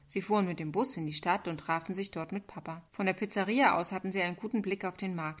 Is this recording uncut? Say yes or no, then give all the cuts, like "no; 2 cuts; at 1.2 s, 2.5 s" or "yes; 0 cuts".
no; 1 cut; at 2.9 s